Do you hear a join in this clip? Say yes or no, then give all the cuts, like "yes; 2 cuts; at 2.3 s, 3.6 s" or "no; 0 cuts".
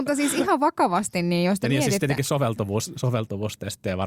no; 0 cuts